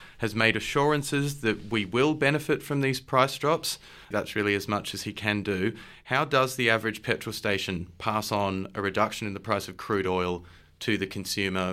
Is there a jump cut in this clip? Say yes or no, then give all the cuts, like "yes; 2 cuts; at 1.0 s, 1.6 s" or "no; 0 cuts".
no; 0 cuts